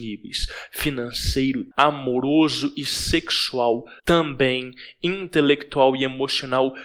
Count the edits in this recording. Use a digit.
2